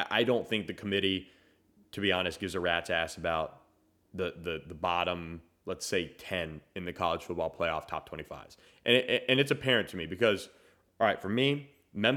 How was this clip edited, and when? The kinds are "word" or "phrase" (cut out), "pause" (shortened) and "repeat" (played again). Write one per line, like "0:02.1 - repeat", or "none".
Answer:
none